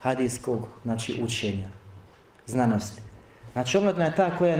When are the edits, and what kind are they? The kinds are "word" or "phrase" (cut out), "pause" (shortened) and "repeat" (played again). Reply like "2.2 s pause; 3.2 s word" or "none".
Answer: none

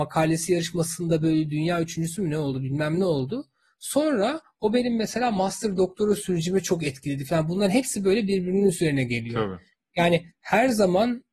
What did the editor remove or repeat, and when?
none

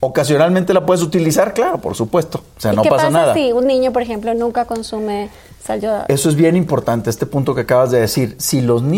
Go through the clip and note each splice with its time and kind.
none

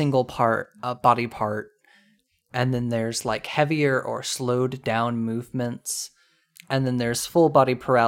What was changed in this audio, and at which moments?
none

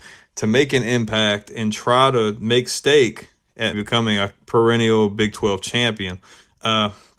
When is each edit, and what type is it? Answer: 3.7 s word

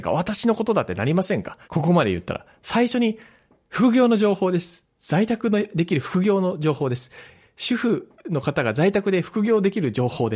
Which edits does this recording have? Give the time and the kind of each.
1.6 s pause

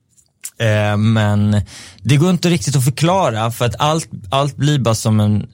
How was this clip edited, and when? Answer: none

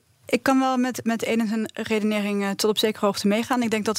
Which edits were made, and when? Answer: none

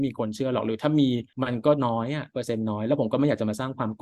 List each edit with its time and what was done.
1.3 s pause

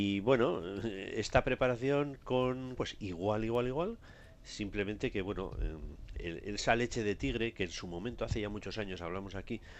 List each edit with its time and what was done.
2.8 s phrase

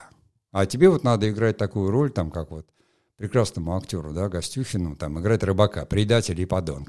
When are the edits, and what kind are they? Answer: none

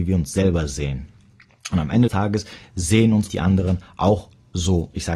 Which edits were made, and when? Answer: 2.1 s word; 3.3 s phrase

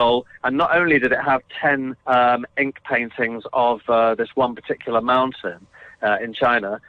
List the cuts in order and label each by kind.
2.0 s pause

